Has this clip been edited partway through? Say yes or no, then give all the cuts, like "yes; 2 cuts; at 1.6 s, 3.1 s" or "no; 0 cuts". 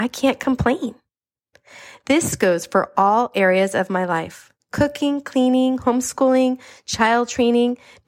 no; 0 cuts